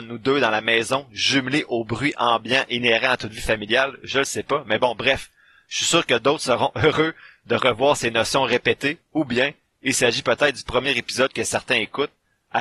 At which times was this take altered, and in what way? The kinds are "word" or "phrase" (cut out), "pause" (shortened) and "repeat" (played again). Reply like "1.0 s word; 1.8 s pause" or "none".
none

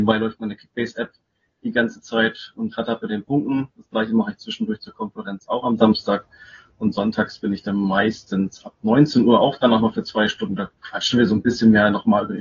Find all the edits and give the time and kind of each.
none

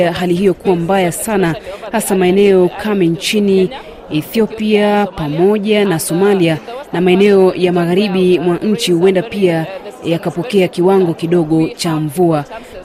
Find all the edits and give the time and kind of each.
none

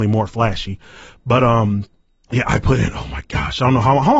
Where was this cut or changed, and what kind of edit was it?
none

